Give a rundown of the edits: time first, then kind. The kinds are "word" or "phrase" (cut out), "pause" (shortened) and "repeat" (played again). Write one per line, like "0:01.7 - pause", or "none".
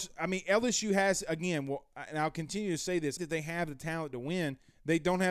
0:03.2 - phrase